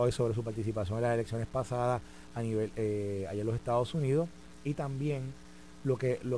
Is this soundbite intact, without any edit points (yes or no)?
yes